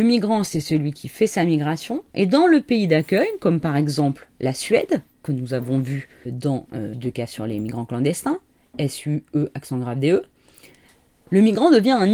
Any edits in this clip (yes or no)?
yes